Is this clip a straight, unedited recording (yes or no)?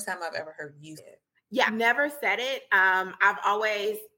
no